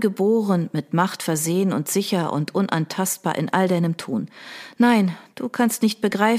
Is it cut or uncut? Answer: uncut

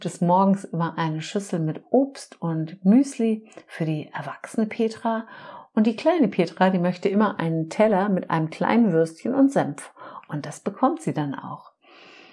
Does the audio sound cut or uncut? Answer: uncut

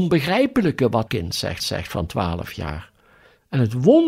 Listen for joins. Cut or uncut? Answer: cut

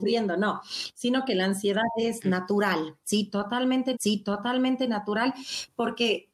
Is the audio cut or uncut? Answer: cut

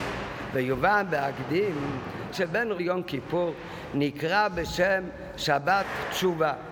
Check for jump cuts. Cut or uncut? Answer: cut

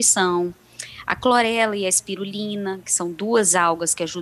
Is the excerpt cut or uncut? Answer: uncut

